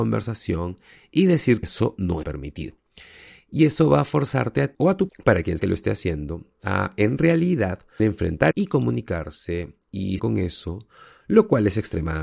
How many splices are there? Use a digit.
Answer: 8